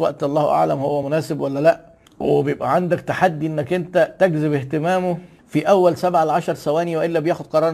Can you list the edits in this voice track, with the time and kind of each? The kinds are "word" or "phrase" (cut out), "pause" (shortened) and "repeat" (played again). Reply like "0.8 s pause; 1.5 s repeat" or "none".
none